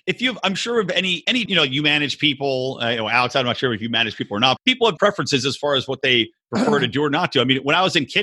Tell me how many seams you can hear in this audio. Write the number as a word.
three